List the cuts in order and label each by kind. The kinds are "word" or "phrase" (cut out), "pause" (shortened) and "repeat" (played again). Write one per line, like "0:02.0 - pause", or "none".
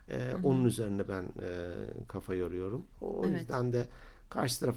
0:02.9 - pause